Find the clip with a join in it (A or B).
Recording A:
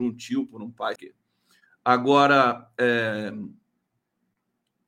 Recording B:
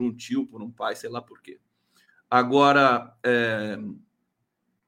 A